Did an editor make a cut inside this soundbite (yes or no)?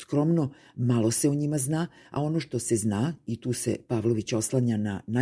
no